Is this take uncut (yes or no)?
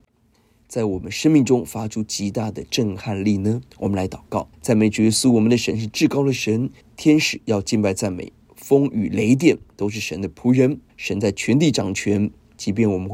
no